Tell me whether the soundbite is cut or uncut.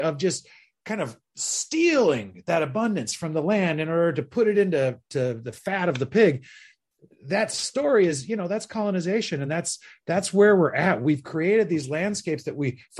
uncut